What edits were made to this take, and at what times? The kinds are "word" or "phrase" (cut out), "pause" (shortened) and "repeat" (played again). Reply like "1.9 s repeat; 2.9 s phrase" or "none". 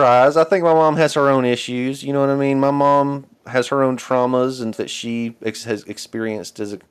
4.7 s word